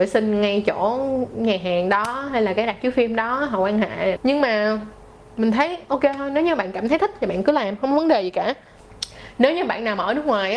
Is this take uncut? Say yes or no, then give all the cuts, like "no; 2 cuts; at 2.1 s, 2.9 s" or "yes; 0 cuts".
no; 1 cut; at 4.2 s